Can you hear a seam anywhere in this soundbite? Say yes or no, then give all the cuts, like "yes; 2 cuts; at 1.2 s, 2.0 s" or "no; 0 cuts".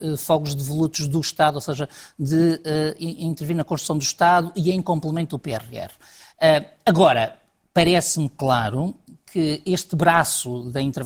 no; 0 cuts